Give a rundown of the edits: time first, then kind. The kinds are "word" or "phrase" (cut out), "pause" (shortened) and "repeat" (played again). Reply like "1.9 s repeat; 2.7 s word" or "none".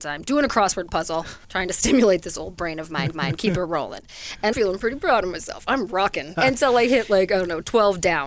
1.4 s pause; 3.1 s repeat; 4.5 s word; 6.3 s phrase